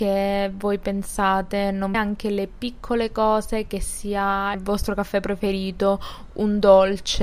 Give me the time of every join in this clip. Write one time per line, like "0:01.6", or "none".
0:01.9
0:04.5